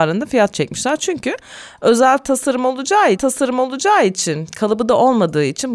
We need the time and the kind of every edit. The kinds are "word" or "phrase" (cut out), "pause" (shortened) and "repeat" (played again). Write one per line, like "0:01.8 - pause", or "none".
0:03.1 - repeat